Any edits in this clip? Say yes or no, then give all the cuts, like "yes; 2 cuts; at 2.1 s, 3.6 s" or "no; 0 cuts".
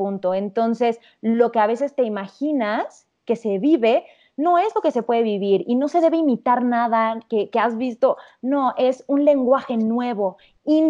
no; 0 cuts